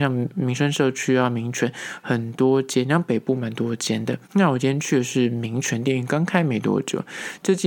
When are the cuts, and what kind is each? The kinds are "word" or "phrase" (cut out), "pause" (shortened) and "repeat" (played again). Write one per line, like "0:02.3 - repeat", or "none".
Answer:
0:04.2 - pause